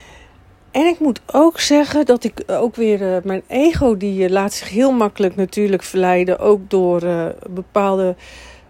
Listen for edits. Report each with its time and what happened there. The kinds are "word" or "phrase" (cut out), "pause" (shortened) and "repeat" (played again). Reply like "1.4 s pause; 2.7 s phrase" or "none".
none